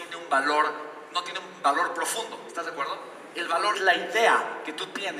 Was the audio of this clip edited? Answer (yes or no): yes